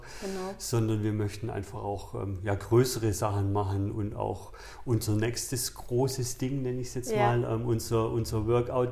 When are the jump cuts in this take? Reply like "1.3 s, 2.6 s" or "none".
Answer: none